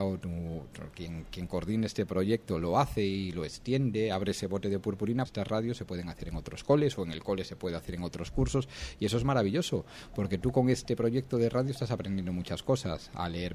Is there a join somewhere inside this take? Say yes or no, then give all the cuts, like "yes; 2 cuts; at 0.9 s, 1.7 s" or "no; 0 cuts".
yes; 1 cut; at 5.3 s